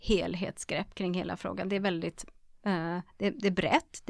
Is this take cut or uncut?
uncut